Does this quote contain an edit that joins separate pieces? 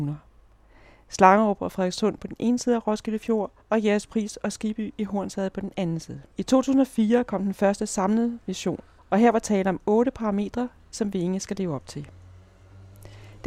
yes; 3 cuts; at 3.6 s, 6.3 s, 9.0 s

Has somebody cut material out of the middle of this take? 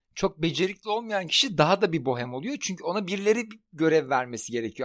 no; 0 cuts

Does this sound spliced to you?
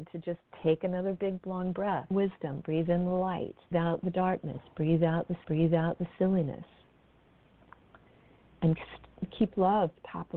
yes; 4 cuts; at 1.4 s, 2.1 s, 3.7 s, 5.4 s

